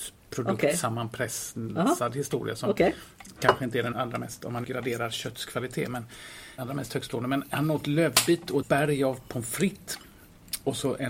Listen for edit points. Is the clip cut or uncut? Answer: cut